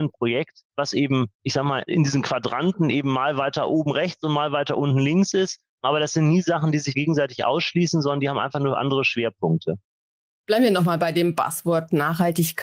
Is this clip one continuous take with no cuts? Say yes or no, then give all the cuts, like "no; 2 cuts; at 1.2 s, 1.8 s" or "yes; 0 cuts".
no; 1 cut; at 1.3 s